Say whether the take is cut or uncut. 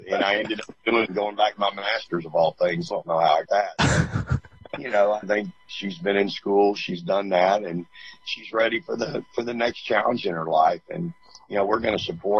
cut